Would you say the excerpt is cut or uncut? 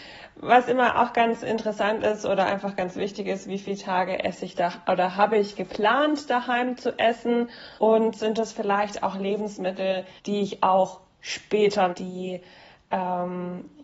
cut